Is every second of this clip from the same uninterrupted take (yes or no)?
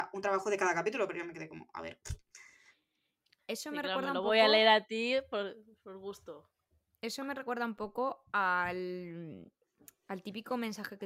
yes